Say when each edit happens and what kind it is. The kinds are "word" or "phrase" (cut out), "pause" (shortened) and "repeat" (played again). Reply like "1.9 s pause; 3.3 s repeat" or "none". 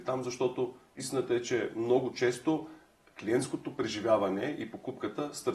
none